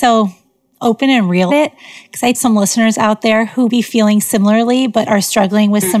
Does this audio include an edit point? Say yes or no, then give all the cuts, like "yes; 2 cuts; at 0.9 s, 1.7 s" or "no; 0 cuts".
yes; 3 cuts; at 1.5 s, 2.3 s, 3.7 s